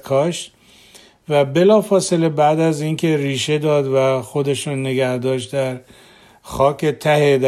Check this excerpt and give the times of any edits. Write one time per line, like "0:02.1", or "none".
none